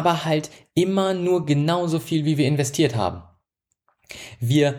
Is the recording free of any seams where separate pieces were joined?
yes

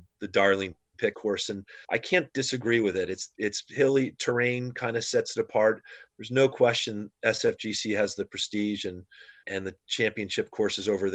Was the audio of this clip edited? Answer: yes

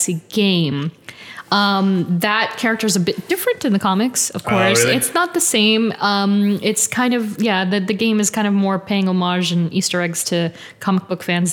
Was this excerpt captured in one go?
yes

